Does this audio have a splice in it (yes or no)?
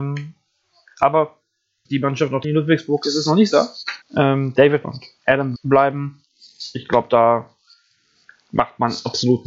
yes